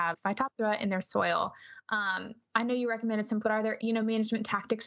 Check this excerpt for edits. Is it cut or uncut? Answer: cut